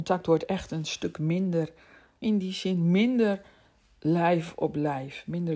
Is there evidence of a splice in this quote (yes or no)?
yes